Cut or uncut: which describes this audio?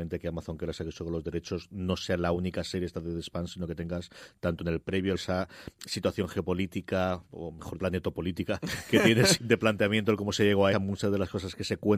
cut